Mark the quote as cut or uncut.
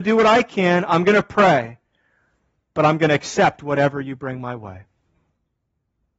uncut